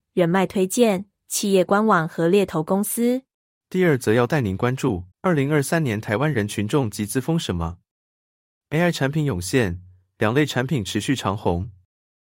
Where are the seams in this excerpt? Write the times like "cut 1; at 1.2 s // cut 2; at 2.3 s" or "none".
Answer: cut 1; at 3.4 s // cut 2; at 5.1 s